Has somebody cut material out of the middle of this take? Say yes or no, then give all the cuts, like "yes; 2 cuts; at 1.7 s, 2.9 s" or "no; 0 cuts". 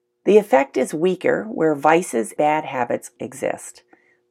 yes; 2 cuts; at 2.4 s, 3.2 s